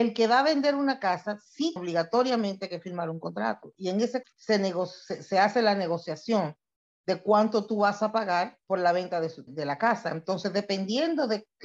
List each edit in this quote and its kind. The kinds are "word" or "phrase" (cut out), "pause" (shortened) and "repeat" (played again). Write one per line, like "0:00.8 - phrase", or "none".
0:01.8 - word
0:04.2 - word
0:08.6 - pause
0:09.5 - word